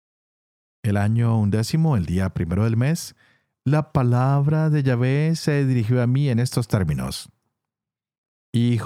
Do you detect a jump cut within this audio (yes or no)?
no